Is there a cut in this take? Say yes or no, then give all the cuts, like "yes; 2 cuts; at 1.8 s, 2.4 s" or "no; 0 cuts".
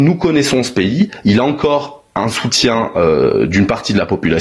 no; 0 cuts